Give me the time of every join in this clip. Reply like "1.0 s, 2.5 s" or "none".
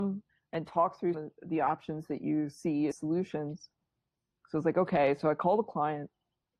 1.1 s, 2.9 s